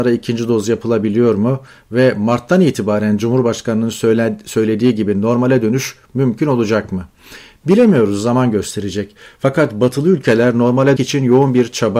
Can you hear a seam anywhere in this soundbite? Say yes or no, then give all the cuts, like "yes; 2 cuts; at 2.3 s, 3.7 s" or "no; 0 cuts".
yes; 1 cut; at 11.0 s